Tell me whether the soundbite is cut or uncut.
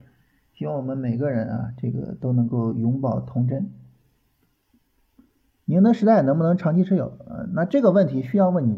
uncut